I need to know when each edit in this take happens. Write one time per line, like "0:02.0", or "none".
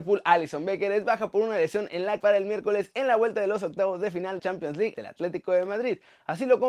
0:02.2
0:04.4
0:04.9